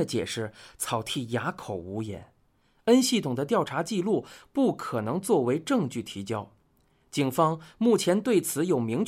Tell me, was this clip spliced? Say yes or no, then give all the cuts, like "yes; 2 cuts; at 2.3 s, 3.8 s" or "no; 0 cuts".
no; 0 cuts